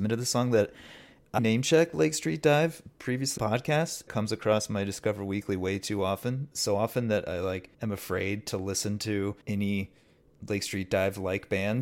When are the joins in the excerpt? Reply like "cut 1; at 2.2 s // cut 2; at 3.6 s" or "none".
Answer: cut 1; at 1.4 s // cut 2; at 3.4 s // cut 3; at 4.1 s // cut 4; at 6.5 s // cut 5; at 7.7 s // cut 6; at 9.4 s